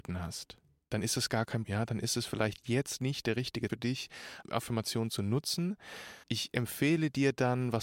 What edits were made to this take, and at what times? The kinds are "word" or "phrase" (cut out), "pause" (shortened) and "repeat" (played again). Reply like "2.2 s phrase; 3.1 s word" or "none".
1.6 s word; 3.7 s word; 4.4 s word; 6.2 s pause